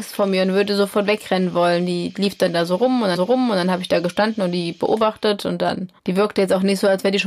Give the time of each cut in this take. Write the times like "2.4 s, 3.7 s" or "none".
3.1 s, 6.0 s